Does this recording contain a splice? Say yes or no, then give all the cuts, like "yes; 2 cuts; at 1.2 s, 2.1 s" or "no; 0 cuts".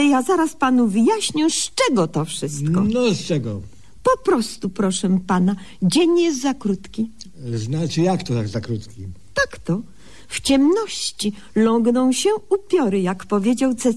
no; 0 cuts